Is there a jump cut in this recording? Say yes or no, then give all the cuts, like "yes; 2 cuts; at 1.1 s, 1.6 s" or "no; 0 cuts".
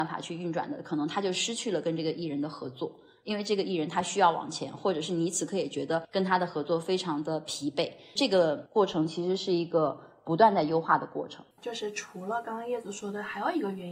yes; 1 cut; at 11.5 s